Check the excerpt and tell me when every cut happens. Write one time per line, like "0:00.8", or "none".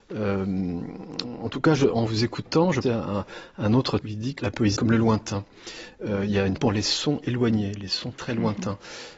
0:02.1
0:02.8
0:04.0
0:04.4
0:04.8
0:06.6
0:08.1